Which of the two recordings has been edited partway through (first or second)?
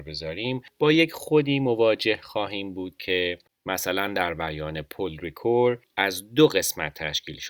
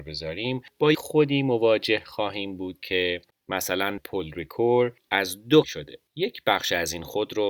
second